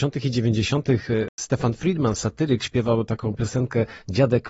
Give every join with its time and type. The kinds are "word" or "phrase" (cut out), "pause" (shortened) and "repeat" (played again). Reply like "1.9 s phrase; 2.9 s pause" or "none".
1.3 s pause